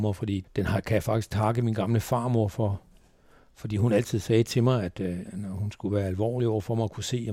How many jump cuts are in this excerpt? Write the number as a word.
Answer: one